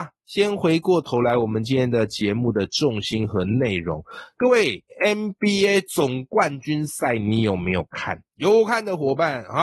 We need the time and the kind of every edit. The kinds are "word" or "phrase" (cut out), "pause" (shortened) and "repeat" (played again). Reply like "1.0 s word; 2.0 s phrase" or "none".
4.9 s phrase; 8.3 s pause